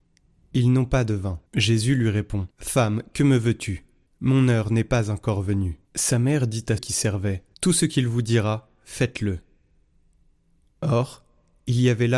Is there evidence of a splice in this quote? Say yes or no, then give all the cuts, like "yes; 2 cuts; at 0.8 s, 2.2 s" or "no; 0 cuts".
yes; 6 cuts; at 1.5 s, 2.5 s, 4.1 s, 5.8 s, 6.8 s, 7.5 s